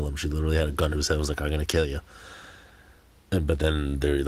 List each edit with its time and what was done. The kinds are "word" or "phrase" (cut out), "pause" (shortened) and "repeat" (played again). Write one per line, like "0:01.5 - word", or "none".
none